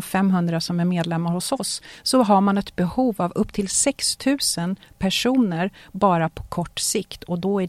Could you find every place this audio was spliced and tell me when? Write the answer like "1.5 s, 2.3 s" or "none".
none